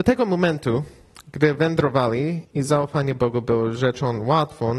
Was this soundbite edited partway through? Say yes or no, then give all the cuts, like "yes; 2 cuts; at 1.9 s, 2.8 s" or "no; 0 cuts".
yes; 1 cut; at 2.4 s